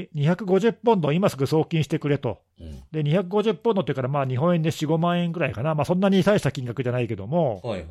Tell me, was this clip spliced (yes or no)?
yes